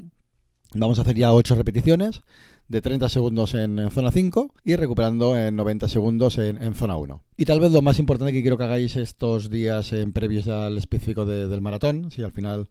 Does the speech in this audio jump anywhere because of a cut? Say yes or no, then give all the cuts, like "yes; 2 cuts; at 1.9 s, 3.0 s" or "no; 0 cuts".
yes; 2 cuts; at 4.6 s, 7.3 s